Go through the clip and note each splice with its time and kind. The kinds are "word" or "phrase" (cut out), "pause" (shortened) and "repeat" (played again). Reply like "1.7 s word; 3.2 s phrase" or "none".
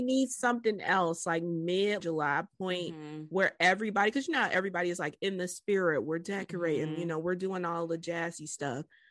2.0 s phrase